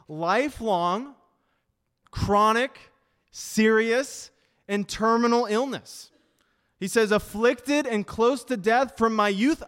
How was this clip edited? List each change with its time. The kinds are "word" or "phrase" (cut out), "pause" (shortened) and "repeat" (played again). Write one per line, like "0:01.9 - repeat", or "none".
none